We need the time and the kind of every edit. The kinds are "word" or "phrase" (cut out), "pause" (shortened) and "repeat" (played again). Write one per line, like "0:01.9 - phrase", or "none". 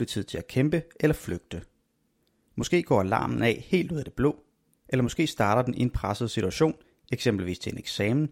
none